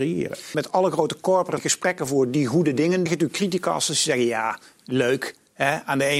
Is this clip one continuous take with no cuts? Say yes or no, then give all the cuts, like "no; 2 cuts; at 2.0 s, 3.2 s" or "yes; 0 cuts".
no; 2 cuts; at 1.6 s, 3.1 s